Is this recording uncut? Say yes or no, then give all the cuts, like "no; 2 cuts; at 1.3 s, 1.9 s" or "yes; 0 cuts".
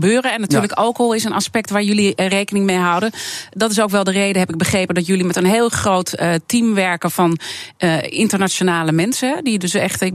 yes; 0 cuts